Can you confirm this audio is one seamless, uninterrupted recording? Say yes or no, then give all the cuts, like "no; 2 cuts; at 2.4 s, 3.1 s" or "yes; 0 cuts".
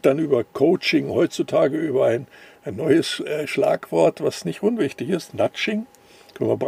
yes; 0 cuts